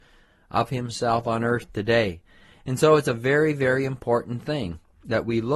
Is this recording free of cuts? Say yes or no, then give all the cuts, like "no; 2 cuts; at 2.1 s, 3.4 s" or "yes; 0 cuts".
yes; 0 cuts